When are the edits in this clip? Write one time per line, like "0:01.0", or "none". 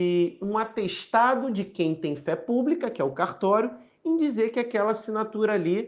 none